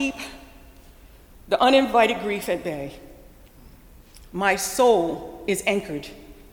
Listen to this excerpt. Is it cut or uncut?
uncut